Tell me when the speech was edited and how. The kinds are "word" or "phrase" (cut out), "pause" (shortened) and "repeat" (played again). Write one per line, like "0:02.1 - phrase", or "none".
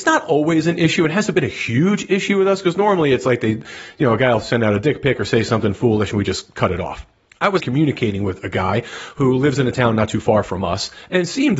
0:07.3 - pause
0:07.6 - word